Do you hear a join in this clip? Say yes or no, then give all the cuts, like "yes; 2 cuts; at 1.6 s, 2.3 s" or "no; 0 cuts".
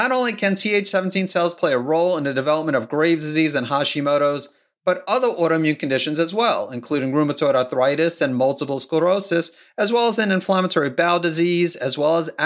no; 0 cuts